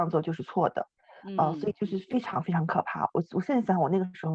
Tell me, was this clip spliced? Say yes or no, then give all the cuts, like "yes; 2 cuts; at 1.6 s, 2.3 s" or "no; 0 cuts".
no; 0 cuts